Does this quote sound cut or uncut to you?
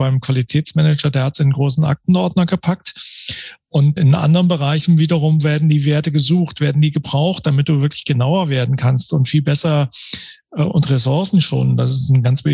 cut